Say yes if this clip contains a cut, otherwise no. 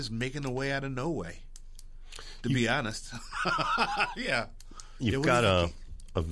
no